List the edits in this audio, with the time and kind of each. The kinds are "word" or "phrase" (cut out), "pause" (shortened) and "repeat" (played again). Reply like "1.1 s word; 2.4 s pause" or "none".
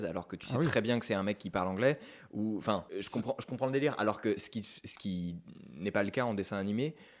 2.9 s pause